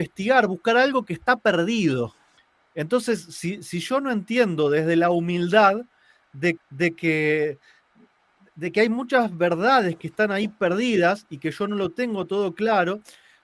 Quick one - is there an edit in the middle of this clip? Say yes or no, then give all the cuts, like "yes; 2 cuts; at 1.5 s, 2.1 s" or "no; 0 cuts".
yes; 2 cuts; at 2.4 s, 6.6 s